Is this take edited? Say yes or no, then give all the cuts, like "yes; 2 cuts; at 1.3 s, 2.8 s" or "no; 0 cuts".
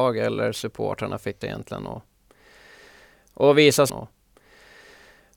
yes; 2 cuts; at 1.4 s, 3.9 s